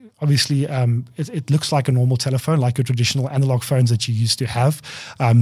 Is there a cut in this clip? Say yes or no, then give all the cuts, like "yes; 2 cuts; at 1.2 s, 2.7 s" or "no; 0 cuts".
no; 0 cuts